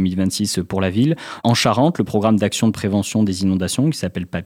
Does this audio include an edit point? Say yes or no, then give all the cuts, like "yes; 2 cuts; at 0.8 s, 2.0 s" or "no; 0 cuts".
no; 0 cuts